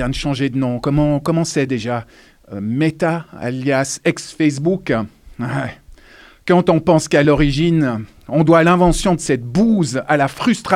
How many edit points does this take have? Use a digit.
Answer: 0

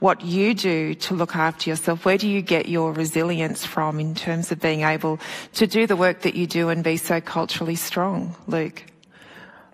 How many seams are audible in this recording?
0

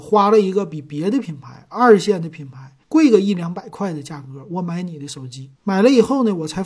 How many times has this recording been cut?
2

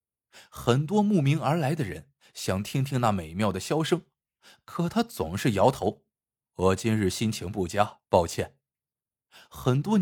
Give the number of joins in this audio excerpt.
2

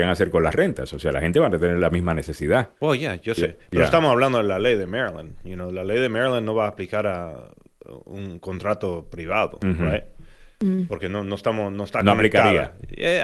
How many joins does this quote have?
1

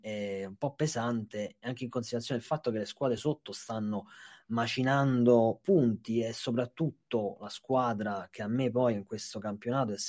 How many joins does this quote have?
0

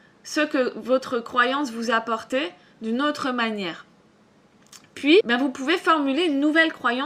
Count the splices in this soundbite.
1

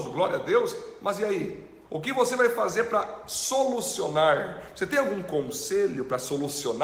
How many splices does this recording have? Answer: 1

